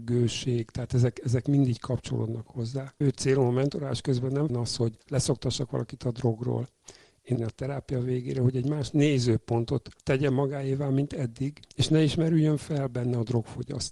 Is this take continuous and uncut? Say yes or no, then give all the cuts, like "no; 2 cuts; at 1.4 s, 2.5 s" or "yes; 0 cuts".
no; 6 cuts; at 3.0 s, 4.5 s, 5.0 s, 7.4 s, 10.0 s, 11.6 s